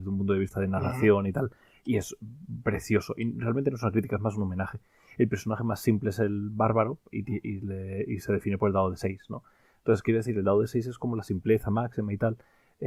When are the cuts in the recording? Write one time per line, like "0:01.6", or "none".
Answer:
none

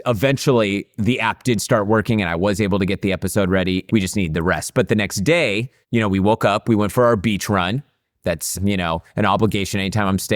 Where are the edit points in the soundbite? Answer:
0:03.9
0:05.8
0:08.5

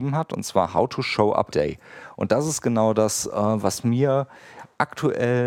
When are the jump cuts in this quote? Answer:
0:01.5

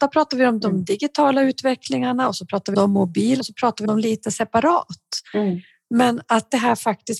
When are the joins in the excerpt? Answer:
0:02.7
0:03.4
0:03.8

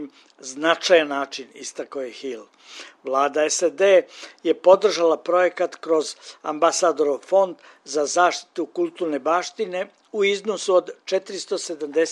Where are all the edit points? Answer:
none

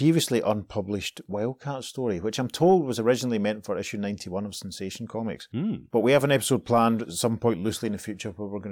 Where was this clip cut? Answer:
none

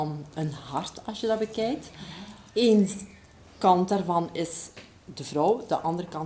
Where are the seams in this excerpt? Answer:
none

